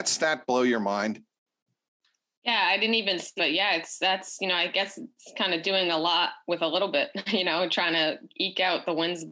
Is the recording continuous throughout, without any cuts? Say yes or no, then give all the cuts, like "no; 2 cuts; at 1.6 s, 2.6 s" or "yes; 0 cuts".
no; 1 cut; at 3.4 s